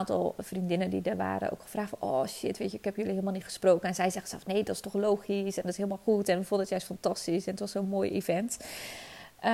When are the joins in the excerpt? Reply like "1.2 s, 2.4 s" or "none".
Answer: none